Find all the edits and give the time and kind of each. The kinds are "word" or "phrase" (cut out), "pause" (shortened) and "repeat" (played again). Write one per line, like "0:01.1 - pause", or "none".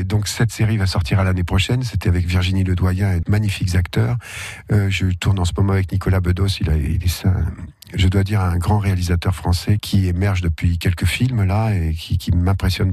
0:03.2 - word
0:09.8 - word